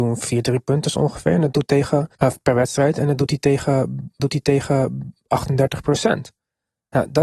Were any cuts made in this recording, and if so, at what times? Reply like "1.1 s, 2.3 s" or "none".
1.7 s, 2.1 s, 4.2 s